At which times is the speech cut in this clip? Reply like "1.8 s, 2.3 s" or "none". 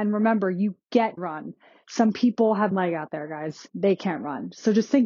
1.2 s, 2.7 s, 3.7 s